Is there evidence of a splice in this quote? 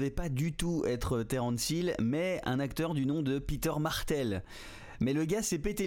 no; 0 cuts

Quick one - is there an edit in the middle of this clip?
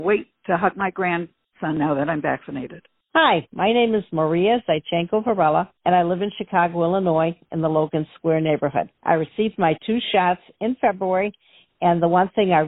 yes; 2 cuts; at 5.8 s, 9.0 s

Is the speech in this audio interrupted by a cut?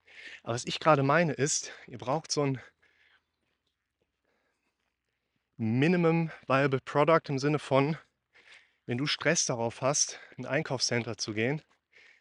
no; 0 cuts

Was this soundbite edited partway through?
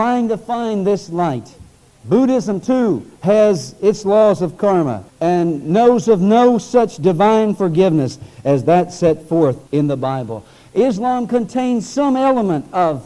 no; 0 cuts

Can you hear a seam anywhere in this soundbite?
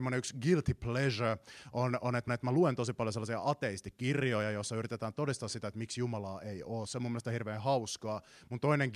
yes; 1 cut; at 2.3 s

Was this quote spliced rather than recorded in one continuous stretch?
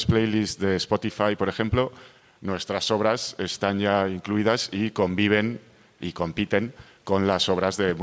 no; 0 cuts

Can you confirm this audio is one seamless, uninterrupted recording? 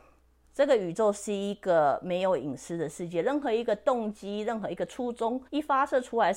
no; 1 cut; at 5.5 s

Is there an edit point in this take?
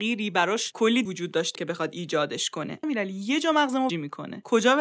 yes; 4 cuts; at 1.0 s, 1.5 s, 2.8 s, 3.9 s

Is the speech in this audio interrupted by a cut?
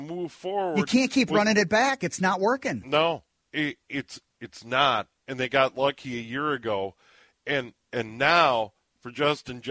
no; 0 cuts

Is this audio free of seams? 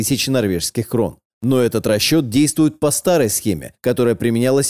yes; 0 cuts

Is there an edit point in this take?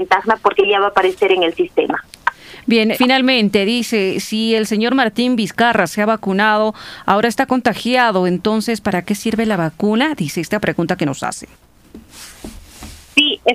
yes; 1 cut; at 2.9 s

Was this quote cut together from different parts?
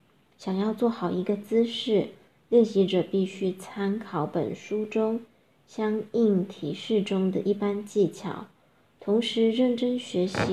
no; 0 cuts

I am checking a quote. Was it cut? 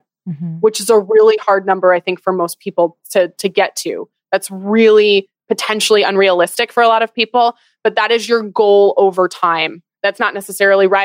no; 0 cuts

